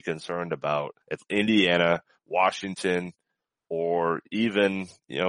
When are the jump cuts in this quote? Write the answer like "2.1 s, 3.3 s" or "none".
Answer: 1.0 s